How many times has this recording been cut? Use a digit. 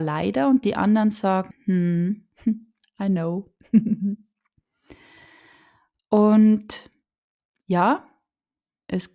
1